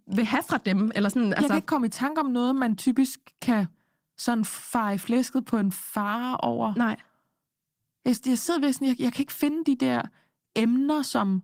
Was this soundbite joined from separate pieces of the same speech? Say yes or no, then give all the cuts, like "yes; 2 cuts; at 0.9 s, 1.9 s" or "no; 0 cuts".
no; 0 cuts